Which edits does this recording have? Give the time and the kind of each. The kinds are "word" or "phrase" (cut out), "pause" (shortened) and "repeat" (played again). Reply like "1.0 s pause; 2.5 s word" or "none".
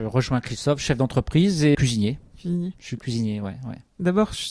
1.7 s phrase